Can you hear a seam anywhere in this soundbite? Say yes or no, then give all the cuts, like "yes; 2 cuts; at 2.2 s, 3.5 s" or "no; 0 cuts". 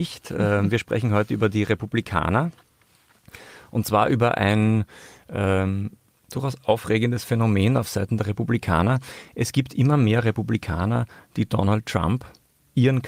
no; 0 cuts